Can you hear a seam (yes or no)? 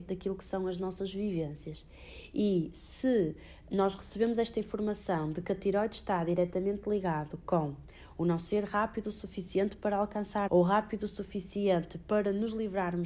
yes